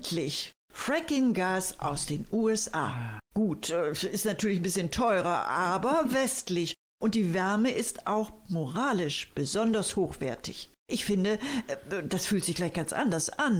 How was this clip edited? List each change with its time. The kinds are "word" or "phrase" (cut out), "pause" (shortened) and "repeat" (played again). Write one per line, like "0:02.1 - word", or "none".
0:03.2 - pause
0:10.8 - pause